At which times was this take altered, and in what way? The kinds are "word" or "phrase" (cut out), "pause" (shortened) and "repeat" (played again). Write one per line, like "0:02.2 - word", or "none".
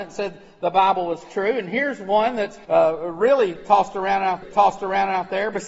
0:02.6 - pause
0:04.4 - repeat